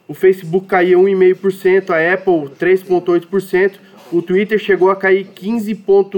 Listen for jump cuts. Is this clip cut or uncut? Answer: uncut